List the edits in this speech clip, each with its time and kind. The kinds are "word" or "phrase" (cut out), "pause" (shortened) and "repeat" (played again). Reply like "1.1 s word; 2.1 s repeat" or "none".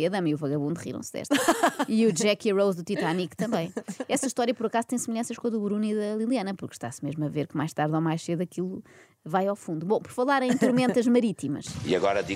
none